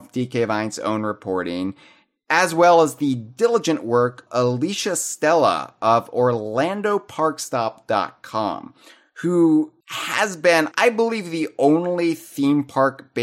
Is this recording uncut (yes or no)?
no